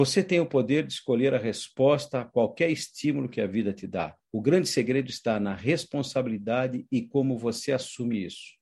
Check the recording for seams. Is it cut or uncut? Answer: cut